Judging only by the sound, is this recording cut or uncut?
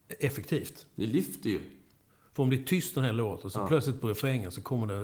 uncut